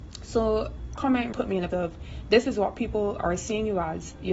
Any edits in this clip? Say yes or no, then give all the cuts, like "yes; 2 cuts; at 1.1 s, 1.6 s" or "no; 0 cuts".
yes; 3 cuts; at 1.0 s, 1.3 s, 1.7 s